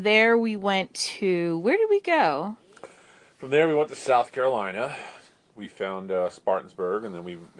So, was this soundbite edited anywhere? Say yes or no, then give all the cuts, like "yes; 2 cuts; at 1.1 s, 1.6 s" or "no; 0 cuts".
no; 0 cuts